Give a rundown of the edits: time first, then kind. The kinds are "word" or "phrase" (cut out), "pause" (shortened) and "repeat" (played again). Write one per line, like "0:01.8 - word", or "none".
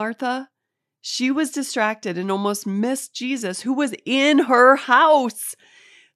none